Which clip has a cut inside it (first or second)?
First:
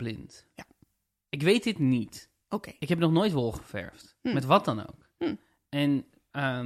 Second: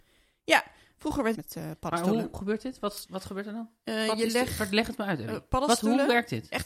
second